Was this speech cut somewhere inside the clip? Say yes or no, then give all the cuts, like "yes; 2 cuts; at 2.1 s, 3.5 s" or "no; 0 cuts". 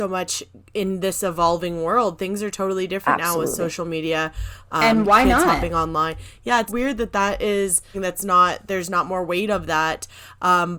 yes; 2 cuts; at 6.7 s, 7.9 s